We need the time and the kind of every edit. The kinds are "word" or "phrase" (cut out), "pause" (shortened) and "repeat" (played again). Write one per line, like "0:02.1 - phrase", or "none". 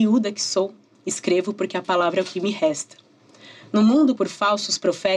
0:04.2 - word